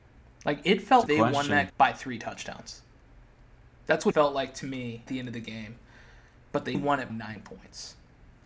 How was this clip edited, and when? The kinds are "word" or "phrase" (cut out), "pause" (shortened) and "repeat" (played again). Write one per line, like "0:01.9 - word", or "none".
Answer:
0:01.1 - word
0:01.7 - word
0:04.1 - word
0:05.1 - word
0:06.7 - word
0:07.1 - word